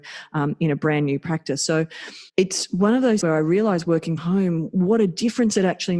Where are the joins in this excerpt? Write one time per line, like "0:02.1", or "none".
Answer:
0:02.3
0:03.2
0:04.2